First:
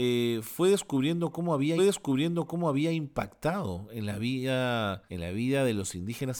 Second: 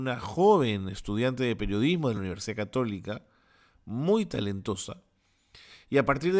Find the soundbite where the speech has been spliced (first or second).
first